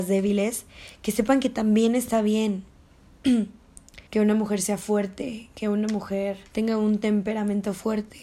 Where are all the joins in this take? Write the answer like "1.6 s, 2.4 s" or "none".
4.1 s, 6.5 s